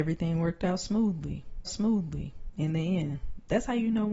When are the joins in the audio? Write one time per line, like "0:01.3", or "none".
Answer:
0:01.7